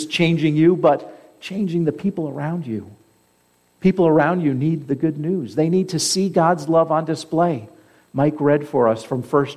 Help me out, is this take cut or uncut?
uncut